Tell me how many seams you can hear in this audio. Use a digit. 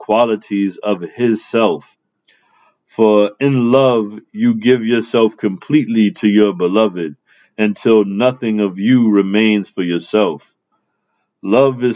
0